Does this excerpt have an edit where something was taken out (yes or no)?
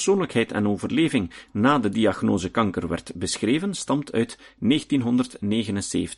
no